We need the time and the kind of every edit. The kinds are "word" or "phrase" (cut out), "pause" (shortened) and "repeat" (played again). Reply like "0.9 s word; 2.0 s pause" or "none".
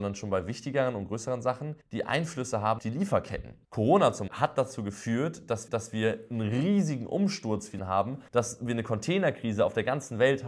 1.8 s pause; 2.8 s word; 3.6 s pause; 4.3 s word; 5.7 s repeat; 7.8 s word; 8.3 s pause